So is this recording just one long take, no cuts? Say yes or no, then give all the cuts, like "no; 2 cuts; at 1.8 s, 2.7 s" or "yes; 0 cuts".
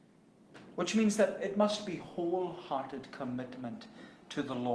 yes; 0 cuts